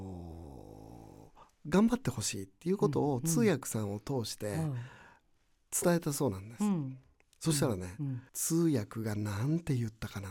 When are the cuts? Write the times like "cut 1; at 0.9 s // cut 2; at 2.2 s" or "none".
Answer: cut 1; at 1.4 s // cut 2; at 8.3 s